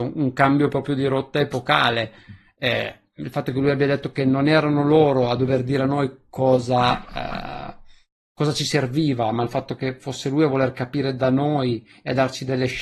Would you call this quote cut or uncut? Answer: uncut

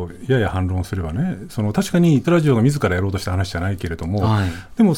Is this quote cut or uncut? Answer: cut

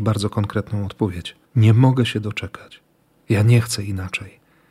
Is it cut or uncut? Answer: cut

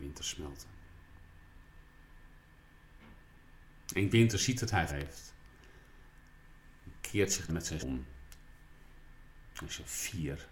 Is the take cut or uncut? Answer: cut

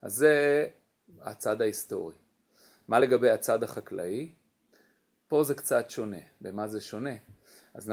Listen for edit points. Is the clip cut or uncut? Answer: uncut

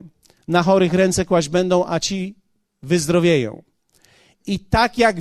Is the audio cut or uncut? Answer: uncut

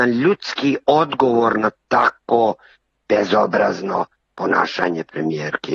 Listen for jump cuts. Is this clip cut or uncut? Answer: uncut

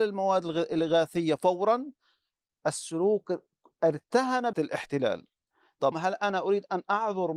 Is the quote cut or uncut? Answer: cut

